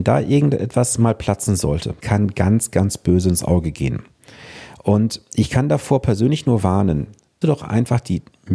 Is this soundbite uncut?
no; 2 cuts; at 2.0 s, 7.4 s

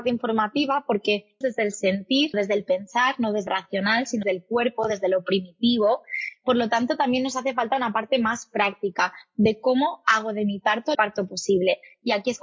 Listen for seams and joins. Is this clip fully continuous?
no; 5 cuts; at 1.4 s, 2.3 s, 3.5 s, 4.2 s, 10.9 s

